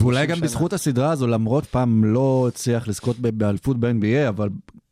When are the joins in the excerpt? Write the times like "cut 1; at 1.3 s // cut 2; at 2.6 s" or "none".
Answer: cut 1; at 1.6 s